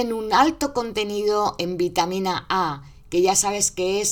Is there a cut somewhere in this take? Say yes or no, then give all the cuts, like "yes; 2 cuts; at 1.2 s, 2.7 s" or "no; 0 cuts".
no; 0 cuts